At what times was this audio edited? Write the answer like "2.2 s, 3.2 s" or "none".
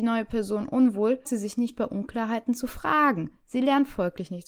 1.2 s